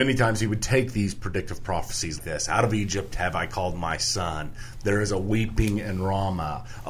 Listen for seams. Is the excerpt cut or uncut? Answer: cut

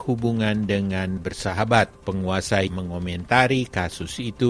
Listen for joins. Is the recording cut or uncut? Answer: cut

